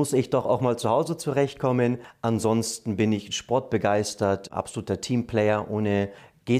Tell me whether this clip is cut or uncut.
uncut